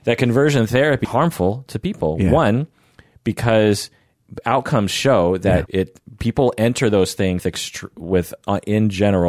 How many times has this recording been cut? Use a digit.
3